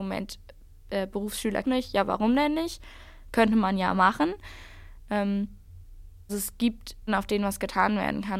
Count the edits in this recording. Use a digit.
3